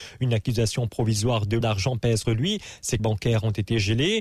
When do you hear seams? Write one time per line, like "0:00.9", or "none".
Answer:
0:01.6
0:02.2
0:03.0